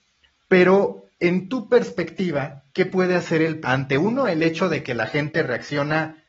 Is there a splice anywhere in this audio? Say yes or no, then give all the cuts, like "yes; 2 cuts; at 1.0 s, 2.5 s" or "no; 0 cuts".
yes; 2 cuts; at 2.7 s, 3.6 s